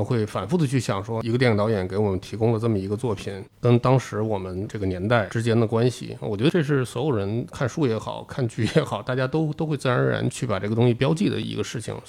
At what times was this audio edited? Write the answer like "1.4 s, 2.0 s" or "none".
3.5 s